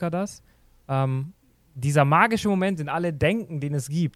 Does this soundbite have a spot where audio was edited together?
no; 0 cuts

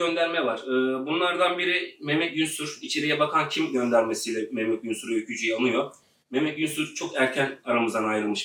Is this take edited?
no; 0 cuts

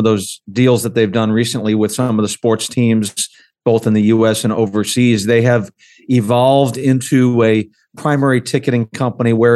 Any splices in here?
no; 0 cuts

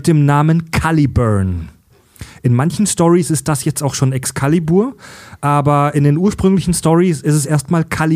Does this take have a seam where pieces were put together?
no; 0 cuts

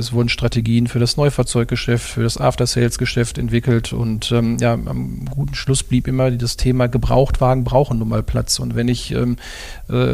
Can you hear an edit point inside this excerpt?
no; 0 cuts

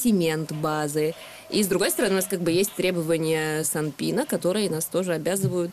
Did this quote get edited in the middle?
no; 0 cuts

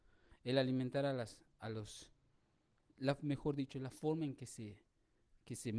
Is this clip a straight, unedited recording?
yes; 0 cuts

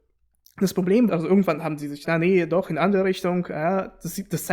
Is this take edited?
yes; 2 cuts; at 1.1 s, 2.0 s

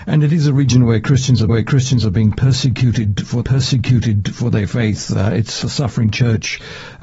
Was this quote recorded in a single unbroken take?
no; 3 cuts; at 1.5 s, 3.4 s, 5.6 s

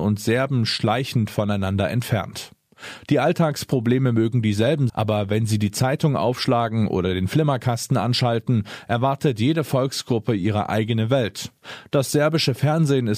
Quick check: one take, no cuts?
no; 1 cut; at 4.9 s

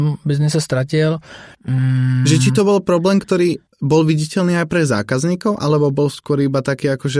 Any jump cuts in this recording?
yes; 2 cuts; at 1.5 s, 3.7 s

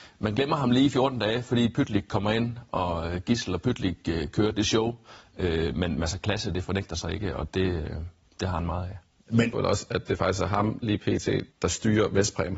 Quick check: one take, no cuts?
no; 3 cuts; at 9.1 s, 9.5 s, 11.5 s

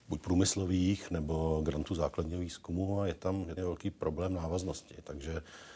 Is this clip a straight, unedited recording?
no; 1 cut; at 3.6 s

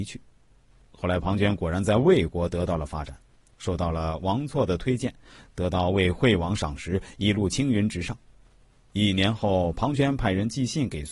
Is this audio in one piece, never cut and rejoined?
yes; 0 cuts

